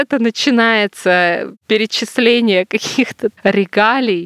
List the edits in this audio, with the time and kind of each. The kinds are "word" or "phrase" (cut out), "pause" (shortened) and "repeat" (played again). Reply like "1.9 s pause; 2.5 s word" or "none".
3.3 s word